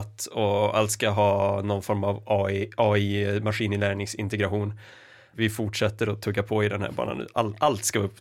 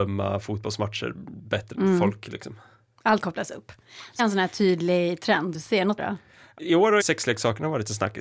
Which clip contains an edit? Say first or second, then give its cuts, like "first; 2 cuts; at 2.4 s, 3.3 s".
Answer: second; 7 cuts; at 1.7 s, 3.2 s, 4.2 s, 5.5 s, 6.0 s, 6.6 s, 7.0 s